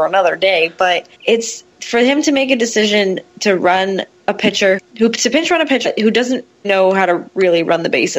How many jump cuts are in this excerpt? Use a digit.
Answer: 5